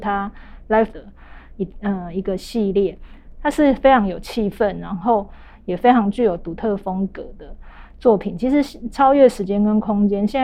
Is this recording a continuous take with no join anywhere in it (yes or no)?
no